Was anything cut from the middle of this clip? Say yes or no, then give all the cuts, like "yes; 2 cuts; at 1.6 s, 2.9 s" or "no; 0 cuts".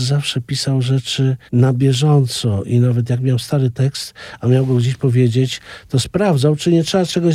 yes; 1 cut; at 1.5 s